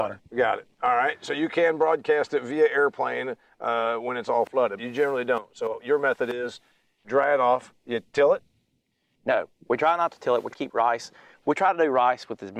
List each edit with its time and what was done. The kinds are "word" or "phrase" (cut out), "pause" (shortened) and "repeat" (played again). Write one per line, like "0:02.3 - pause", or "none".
0:04.8 - word
0:07.0 - word
0:10.5 - word